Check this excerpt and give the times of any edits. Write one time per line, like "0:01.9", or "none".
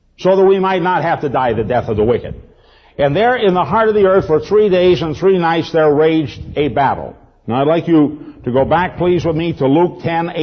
none